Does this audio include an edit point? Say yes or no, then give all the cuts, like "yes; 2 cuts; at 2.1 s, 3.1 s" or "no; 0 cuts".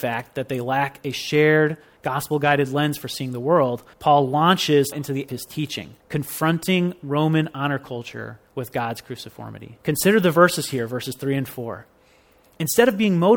yes; 6 cuts; at 3.9 s, 4.9 s, 5.3 s, 6.0 s, 8.4 s, 9.8 s